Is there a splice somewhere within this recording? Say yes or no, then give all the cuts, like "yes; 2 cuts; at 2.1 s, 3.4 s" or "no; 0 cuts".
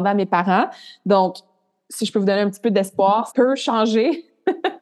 yes; 1 cut; at 3.3 s